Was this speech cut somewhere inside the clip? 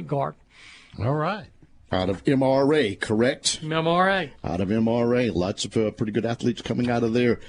no; 0 cuts

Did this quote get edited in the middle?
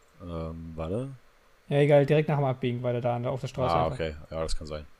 no; 0 cuts

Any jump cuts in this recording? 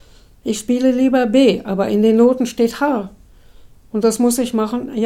no; 0 cuts

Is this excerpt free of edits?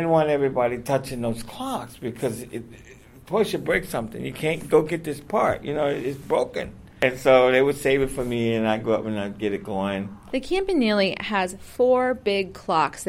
yes; 0 cuts

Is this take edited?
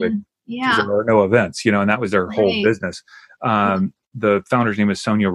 no; 0 cuts

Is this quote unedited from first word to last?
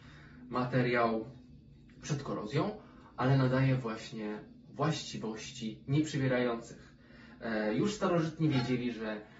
yes; 0 cuts

